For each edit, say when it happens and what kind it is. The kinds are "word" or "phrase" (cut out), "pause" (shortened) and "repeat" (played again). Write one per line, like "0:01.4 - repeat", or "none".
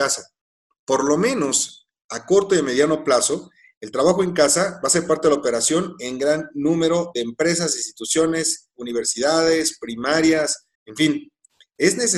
0:10.7 - pause